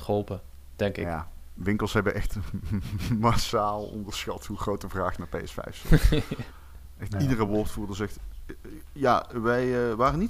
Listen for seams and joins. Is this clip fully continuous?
yes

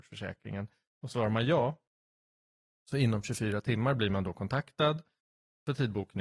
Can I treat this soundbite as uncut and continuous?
yes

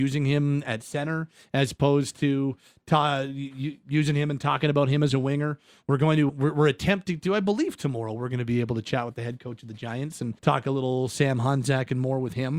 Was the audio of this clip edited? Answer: yes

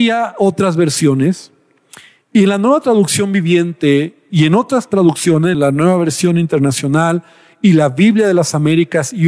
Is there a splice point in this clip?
yes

